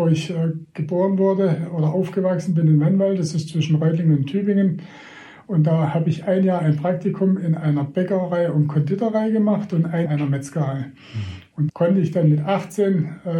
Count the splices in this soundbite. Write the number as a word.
two